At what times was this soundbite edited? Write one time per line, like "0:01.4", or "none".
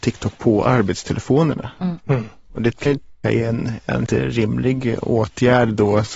0:02.9
0:03.2
0:04.1

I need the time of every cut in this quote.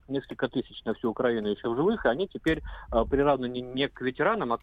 0:01.6

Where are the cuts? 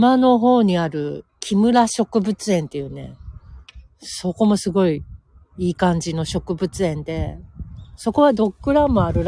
0:01.3

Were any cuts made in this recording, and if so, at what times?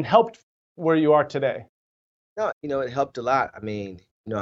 0:02.5

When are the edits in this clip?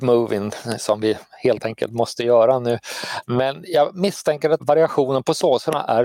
0:04.6

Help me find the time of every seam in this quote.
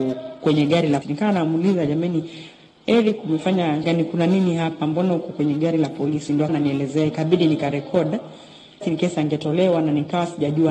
0:01.0
0:03.8
0:06.5
0:08.8

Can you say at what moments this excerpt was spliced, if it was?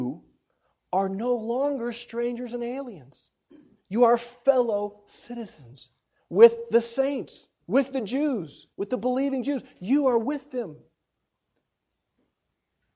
0:03.5
0:07.6
0:08.7

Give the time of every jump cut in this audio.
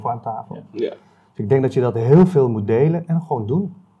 none

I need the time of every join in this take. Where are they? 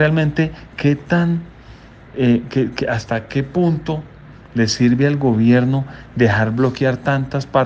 none

